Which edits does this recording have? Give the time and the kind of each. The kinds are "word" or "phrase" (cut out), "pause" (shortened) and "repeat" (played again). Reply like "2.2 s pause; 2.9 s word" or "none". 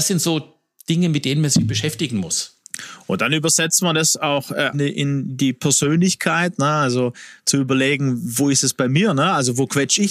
4.7 s word